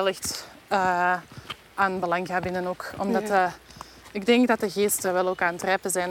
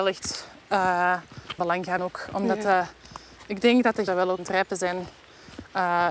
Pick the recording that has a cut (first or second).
second